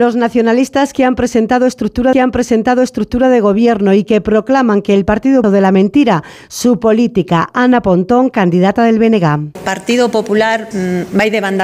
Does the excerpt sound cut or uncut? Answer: cut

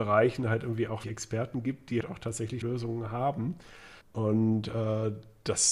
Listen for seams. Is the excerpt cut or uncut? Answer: cut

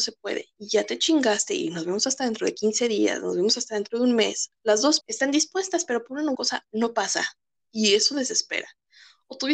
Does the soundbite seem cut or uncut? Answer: cut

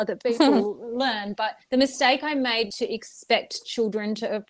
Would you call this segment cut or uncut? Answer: cut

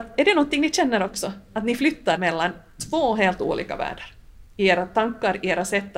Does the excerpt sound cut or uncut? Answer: cut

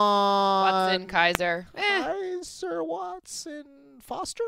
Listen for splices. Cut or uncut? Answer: uncut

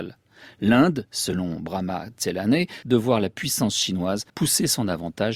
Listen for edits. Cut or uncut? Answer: cut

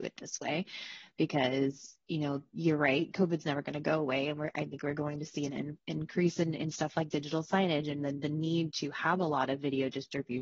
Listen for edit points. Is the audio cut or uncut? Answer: uncut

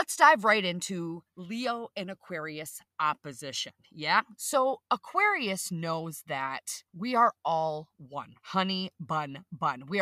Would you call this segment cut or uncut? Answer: cut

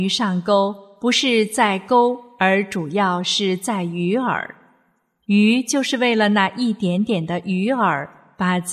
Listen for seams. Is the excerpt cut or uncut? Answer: uncut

